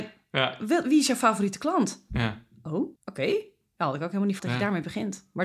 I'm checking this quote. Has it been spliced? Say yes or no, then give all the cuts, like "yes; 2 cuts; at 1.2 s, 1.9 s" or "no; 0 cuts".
yes; 2 cuts; at 3.0 s, 4.4 s